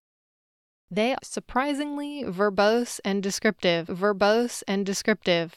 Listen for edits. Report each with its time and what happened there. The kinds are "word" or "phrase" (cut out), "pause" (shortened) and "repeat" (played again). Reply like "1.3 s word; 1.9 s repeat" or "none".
1.2 s word; 3.9 s repeat